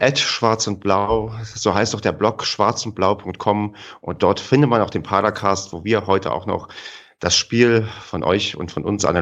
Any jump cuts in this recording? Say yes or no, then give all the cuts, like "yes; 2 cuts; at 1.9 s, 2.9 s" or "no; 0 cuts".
no; 0 cuts